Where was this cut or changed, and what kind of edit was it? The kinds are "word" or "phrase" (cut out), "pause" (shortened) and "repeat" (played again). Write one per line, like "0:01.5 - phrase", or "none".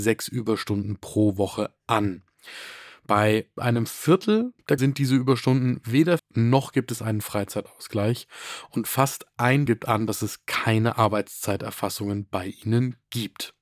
0:03.6 - word
0:04.8 - word
0:06.2 - word
0:09.7 - word